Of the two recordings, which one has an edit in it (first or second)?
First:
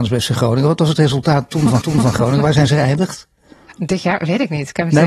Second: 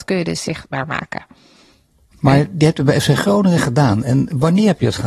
first